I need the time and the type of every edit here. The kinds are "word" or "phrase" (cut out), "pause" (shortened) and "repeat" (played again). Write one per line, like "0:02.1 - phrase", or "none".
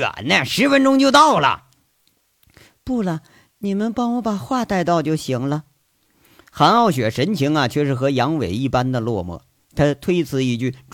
none

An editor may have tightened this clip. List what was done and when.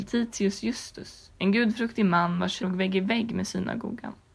0:01.3 - pause
0:02.6 - word

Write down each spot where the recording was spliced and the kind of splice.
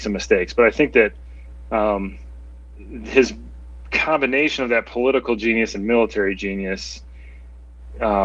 none

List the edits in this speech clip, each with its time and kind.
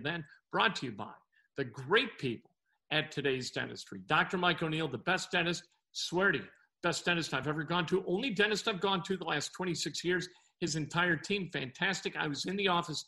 none

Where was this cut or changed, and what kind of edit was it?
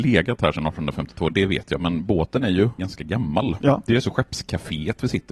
0:02.8 - word

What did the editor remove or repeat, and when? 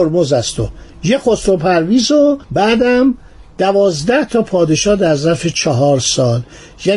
0:02.4 - pause

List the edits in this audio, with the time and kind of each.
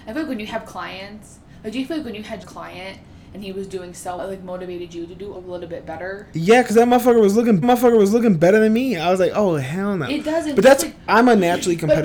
0:02.4 - word
0:04.2 - word
0:05.3 - word
0:07.6 - repeat
0:11.1 - word

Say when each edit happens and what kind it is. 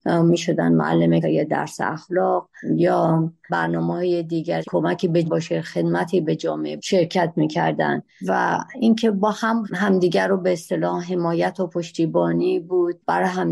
0:01.2 - word
0:04.6 - phrase
0:05.2 - word
0:06.8 - word
0:09.6 - word

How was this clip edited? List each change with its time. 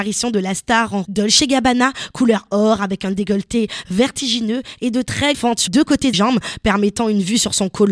0:01.0 - word
0:05.3 - word
0:05.7 - word
0:06.1 - word

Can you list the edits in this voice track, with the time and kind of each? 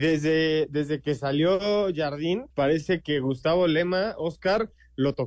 0:02.5 - pause

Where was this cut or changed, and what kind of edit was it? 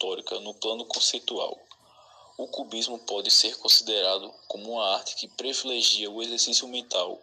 none

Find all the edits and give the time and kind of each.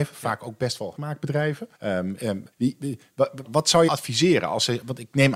0:01.0 - word
0:01.7 - pause
0:02.5 - pause
0:03.4 - word
0:03.9 - phrase

